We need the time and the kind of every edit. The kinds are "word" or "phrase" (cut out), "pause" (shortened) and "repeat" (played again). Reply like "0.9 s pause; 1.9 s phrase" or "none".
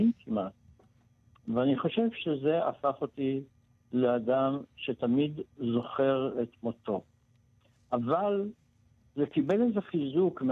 none